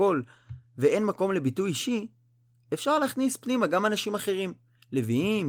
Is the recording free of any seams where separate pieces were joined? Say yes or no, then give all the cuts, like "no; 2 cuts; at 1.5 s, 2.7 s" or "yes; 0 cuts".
yes; 0 cuts